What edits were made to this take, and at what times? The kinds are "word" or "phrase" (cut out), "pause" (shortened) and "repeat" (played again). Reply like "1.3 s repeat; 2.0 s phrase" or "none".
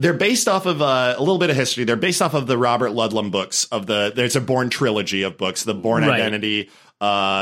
none